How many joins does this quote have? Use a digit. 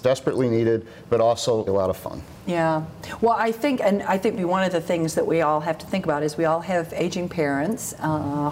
2